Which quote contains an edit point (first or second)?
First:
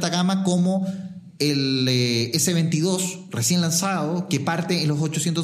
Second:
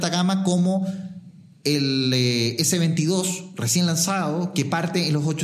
first